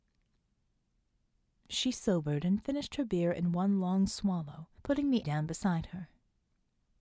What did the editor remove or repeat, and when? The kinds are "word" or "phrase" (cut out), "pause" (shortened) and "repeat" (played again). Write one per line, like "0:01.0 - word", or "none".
0:04.8 - pause
0:05.2 - word